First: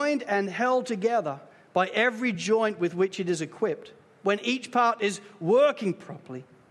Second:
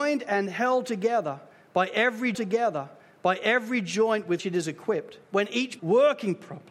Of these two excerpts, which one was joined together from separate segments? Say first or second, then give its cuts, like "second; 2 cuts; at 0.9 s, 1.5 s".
second; 4 cuts; at 2.3 s, 4.4 s, 5.2 s, 5.8 s